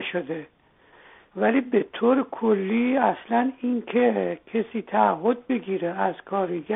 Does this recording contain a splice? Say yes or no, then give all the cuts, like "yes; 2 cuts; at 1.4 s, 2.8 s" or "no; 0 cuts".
no; 0 cuts